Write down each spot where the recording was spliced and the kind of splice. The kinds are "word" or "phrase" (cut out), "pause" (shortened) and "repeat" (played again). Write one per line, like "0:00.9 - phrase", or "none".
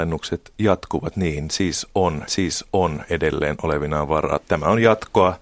0:02.3 - repeat